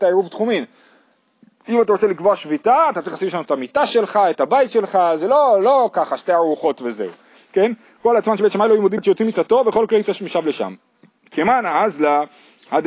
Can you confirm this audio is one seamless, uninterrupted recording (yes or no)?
no